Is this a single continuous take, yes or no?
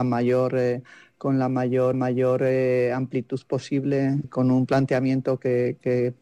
no